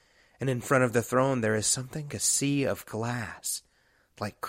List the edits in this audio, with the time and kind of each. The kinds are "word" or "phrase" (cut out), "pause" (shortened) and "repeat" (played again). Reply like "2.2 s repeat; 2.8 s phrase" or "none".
2.1 s word